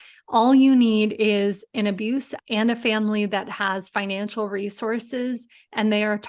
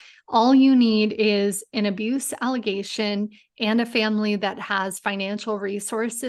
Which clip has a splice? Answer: first; 1 cut; at 2.4 s

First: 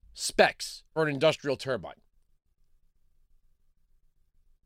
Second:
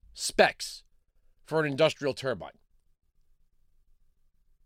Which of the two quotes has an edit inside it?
first; 1 cut; at 1.0 s

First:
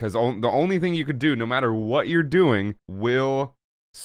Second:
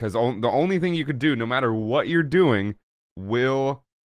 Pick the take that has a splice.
first; 1 cut; at 2.8 s

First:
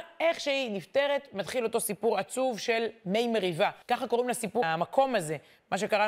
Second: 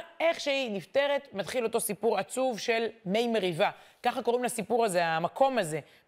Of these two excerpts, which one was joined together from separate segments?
first; 2 cuts; at 3.8 s, 4.6 s

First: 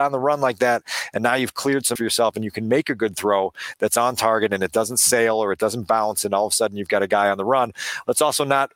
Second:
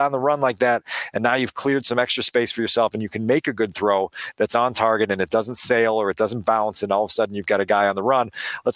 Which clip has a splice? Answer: first; 1 cut; at 2.0 s

